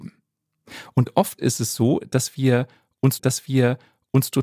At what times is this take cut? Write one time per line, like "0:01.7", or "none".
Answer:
0:03.2